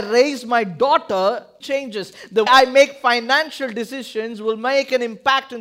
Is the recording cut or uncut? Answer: cut